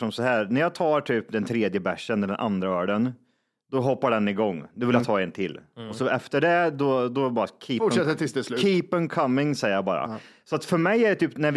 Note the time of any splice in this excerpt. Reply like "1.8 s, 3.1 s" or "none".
none